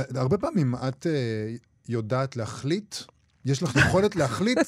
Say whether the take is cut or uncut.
uncut